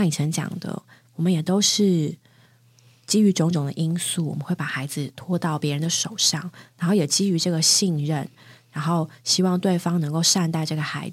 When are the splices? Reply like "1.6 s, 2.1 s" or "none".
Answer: none

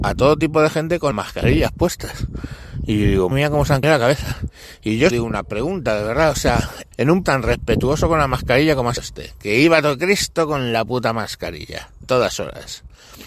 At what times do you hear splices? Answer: 1.1 s, 3.3 s, 3.8 s, 5.1 s, 6.9 s, 7.2 s, 9.0 s, 12.0 s

